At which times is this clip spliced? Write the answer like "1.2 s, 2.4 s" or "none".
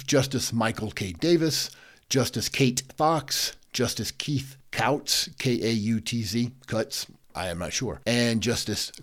none